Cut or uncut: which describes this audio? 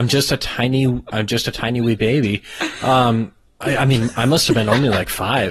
uncut